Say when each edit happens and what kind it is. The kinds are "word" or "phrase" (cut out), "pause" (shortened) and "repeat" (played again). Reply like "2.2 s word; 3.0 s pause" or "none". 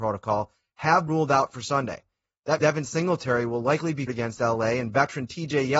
1.1 s word; 2.6 s word; 4.1 s word